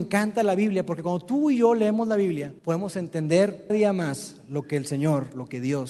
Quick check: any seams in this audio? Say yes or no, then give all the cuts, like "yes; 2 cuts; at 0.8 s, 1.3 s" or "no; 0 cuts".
yes; 2 cuts; at 2.6 s, 3.7 s